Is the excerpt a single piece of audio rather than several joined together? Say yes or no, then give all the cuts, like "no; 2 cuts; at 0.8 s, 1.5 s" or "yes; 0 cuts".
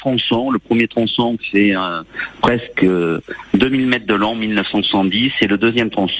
yes; 0 cuts